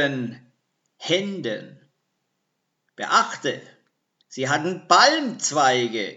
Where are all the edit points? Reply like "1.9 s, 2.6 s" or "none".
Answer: none